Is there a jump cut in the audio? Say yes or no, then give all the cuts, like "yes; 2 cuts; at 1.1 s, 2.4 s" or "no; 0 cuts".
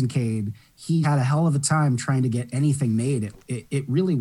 yes; 1 cut; at 1.0 s